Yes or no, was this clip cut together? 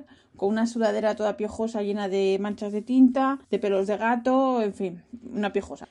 yes